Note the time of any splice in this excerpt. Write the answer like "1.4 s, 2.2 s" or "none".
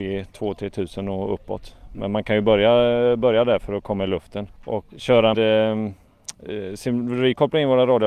5.3 s